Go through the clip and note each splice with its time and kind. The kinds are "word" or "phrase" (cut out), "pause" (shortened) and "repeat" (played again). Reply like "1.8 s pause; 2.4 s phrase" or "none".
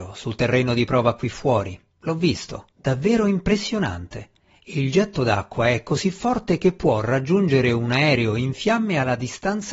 1.9 s pause; 2.7 s pause; 4.4 s pause